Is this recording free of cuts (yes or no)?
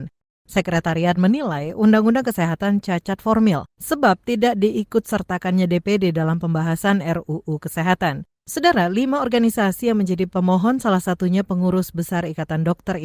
no